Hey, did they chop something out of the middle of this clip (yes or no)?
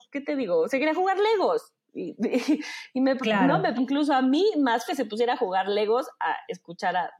yes